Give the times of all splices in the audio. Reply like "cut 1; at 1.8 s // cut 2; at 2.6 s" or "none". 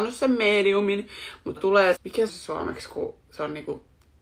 cut 1; at 1.6 s // cut 2; at 1.9 s // cut 3; at 2.3 s